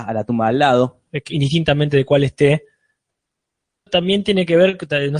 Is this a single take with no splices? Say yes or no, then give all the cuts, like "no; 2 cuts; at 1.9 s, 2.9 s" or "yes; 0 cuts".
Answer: yes; 0 cuts